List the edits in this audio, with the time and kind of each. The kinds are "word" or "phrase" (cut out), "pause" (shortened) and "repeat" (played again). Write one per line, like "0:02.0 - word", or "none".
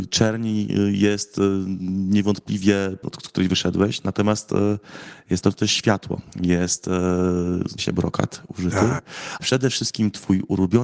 0:03.0 - word
0:05.4 - word
0:07.8 - word
0:09.4 - word